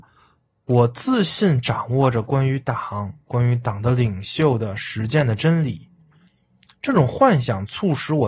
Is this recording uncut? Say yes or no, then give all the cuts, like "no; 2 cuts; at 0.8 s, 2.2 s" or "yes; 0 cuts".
yes; 0 cuts